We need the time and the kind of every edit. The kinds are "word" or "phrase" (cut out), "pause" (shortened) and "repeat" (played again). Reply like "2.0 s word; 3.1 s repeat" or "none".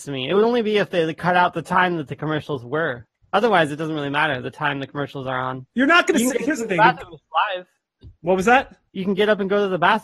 3.2 s pause; 5.7 s pause; 8.1 s pause; 8.9 s pause